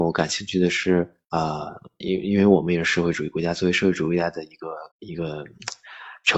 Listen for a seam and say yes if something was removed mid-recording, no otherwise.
yes